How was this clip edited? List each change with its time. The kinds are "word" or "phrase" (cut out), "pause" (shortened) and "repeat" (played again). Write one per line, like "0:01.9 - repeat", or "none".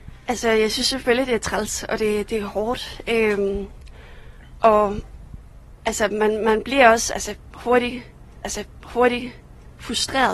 0:08.4 - repeat